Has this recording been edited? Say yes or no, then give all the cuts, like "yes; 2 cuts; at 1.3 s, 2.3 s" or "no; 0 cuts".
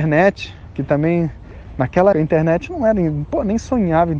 yes; 1 cut; at 2.1 s